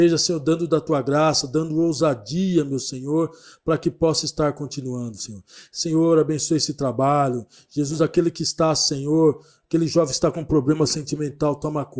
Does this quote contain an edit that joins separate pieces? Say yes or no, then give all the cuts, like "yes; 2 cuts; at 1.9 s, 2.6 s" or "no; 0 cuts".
no; 0 cuts